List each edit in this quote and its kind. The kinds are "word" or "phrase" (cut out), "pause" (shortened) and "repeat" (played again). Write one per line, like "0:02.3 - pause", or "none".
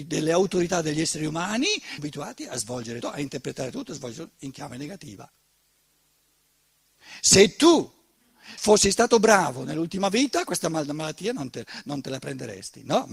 0:02.0 - word
0:03.0 - word
0:08.6 - word